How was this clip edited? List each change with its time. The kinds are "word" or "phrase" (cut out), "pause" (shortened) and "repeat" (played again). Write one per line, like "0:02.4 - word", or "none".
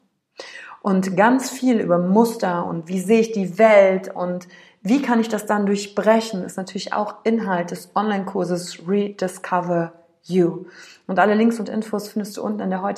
none